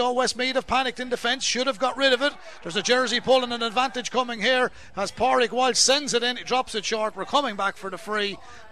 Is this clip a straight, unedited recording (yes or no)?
yes